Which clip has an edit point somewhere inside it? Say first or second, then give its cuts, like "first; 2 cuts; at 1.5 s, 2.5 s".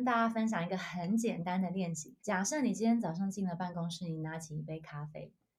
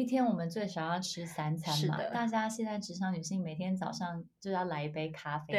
first; 1 cut; at 2.2 s